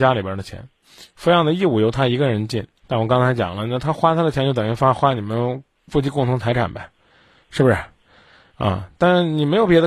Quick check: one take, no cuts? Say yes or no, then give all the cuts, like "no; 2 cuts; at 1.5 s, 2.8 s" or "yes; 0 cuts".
no; 1 cut; at 2.8 s